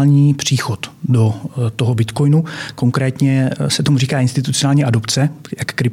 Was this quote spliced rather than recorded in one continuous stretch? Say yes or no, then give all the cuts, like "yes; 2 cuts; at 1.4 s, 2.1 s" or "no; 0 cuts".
no; 0 cuts